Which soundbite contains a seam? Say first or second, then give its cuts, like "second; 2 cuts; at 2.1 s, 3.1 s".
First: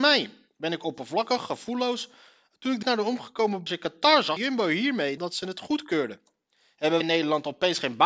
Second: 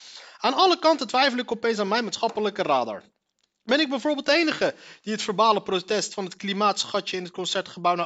first; 5 cuts; at 2.8 s, 3.7 s, 4.4 s, 5.2 s, 7.0 s